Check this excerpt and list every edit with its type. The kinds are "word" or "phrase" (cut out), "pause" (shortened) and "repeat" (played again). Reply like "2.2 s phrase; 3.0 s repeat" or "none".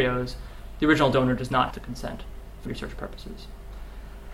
1.7 s word; 2.7 s word